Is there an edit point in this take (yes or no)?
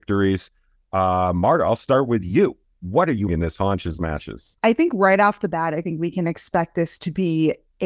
yes